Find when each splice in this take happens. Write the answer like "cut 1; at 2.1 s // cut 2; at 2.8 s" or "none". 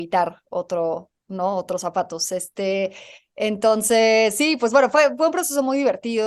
none